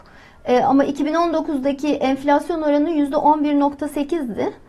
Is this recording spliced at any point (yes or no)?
no